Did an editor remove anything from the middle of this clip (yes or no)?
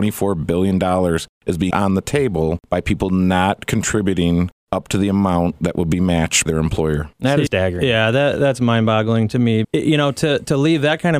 yes